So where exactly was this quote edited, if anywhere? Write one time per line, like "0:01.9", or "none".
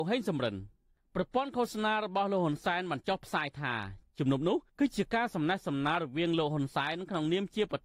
0:04.7